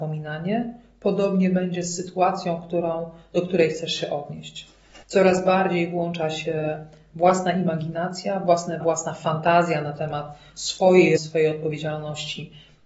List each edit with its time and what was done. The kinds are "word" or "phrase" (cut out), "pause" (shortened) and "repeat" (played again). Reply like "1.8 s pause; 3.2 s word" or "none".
5.0 s pause; 8.8 s word; 11.2 s word